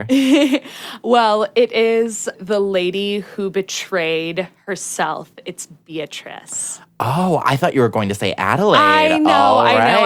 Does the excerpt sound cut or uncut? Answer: cut